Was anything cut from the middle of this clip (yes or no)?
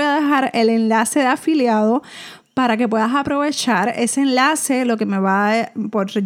no